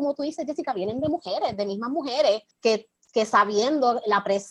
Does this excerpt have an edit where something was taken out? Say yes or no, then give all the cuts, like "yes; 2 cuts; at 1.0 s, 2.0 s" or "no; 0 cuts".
yes; 1 cut; at 2.5 s